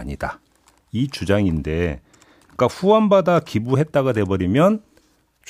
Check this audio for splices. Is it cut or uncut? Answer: uncut